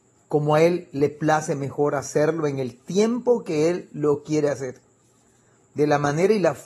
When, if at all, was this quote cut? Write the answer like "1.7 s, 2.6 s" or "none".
none